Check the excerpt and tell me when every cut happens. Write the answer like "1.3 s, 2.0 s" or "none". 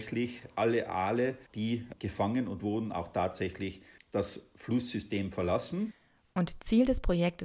1.5 s, 2.6 s, 4.0 s